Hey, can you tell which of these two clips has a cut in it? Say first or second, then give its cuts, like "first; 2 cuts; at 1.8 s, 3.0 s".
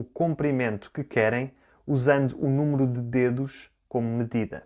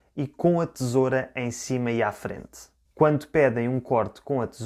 second; 1 cut; at 2.8 s